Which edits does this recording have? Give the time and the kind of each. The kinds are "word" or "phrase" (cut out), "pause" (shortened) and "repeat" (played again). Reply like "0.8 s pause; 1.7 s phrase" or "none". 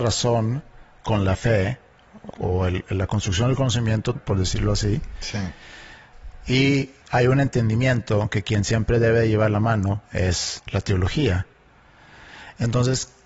2.3 s word; 4.1 s phrase; 7.0 s pause; 10.0 s pause